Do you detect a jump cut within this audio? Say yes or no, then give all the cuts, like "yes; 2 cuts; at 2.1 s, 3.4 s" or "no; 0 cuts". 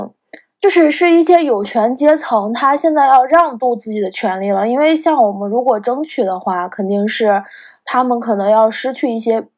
no; 0 cuts